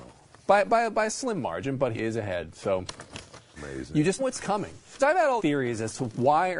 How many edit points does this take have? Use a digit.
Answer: 5